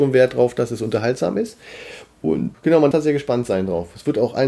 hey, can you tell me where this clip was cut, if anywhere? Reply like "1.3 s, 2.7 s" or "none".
2.5 s, 2.9 s